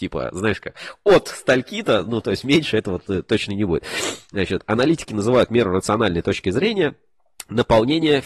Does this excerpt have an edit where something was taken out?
no; 0 cuts

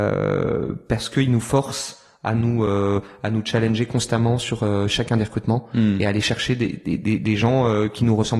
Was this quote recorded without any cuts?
yes; 0 cuts

